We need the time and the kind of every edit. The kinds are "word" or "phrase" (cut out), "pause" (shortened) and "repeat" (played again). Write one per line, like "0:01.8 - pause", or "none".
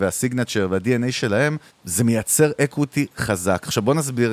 0:01.7 - pause